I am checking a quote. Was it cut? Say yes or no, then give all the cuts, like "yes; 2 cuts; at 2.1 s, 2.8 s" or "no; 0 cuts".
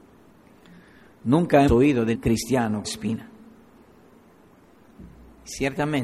yes; 3 cuts; at 1.7 s, 2.1 s, 2.8 s